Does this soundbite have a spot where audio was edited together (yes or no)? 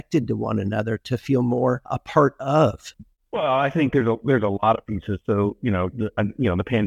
no